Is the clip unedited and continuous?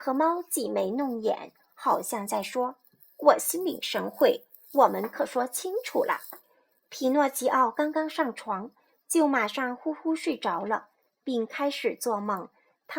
no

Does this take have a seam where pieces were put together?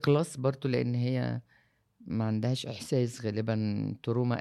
no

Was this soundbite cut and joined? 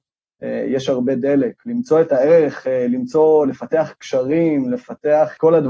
no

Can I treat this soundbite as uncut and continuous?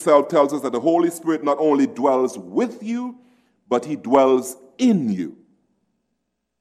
yes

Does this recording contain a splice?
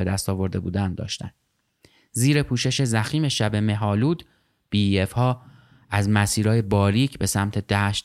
no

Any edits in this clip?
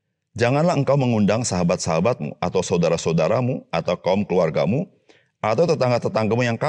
no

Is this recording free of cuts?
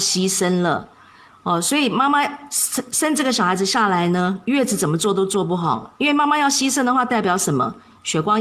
yes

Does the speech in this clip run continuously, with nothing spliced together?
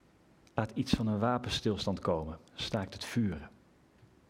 no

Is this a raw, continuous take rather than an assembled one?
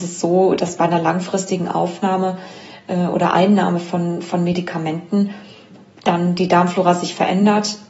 yes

